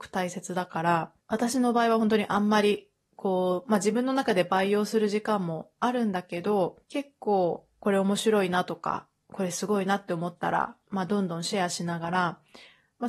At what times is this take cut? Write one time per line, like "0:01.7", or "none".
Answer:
0:01.2
0:06.8
0:10.8